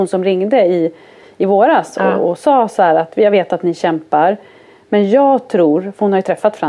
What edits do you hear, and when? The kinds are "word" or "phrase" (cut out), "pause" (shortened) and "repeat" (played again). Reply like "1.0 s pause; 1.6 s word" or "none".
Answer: none